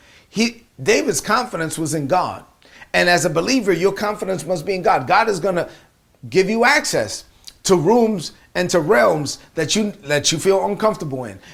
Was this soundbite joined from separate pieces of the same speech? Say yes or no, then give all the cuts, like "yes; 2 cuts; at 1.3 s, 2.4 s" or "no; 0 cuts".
no; 0 cuts